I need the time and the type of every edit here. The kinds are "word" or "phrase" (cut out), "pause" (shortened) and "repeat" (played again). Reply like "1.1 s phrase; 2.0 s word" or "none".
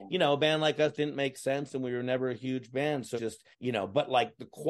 0.9 s word; 3.2 s word; 3.5 s pause